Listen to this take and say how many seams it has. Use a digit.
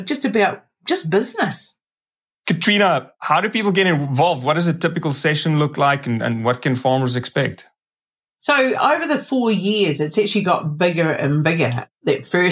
0